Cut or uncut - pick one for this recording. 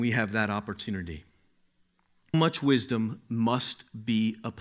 cut